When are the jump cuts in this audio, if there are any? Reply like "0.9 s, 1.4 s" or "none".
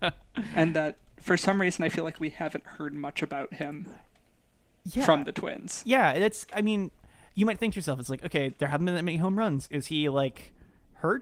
none

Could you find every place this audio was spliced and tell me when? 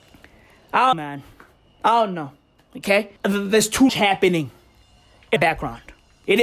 0.9 s, 3.2 s, 3.9 s, 5.4 s

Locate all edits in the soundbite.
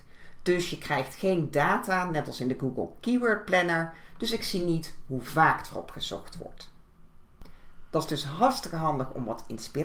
none

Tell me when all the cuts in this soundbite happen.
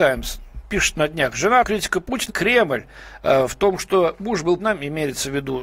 1.6 s, 2.3 s, 4.6 s

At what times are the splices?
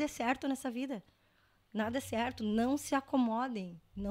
none

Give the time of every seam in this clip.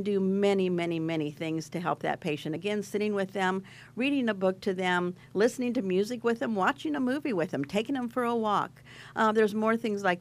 none

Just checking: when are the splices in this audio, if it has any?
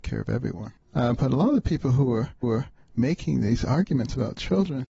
2.4 s

